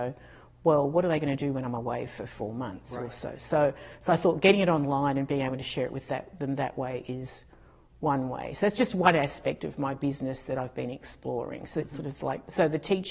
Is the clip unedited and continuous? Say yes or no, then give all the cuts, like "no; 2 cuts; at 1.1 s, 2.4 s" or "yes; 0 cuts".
yes; 0 cuts